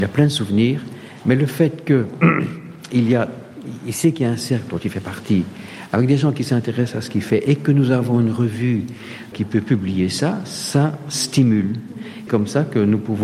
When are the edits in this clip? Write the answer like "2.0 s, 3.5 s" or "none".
9.3 s, 12.3 s